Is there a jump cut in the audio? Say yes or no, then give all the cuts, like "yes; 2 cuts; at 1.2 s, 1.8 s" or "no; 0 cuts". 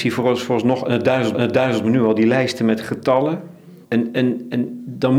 yes; 2 cuts; at 1.3 s, 3.8 s